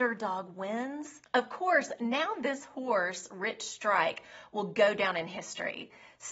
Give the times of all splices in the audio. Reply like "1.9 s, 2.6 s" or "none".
1.2 s